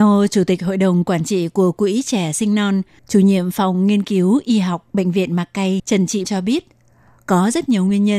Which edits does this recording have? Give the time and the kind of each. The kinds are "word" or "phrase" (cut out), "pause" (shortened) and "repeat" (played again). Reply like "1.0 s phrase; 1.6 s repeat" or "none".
6.2 s word